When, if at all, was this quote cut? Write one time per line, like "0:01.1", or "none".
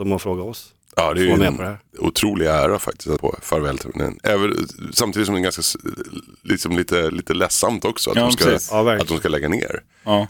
0:03.2